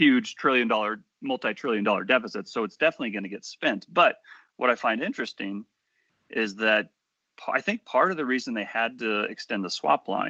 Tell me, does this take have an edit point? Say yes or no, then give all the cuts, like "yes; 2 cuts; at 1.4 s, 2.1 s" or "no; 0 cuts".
no; 0 cuts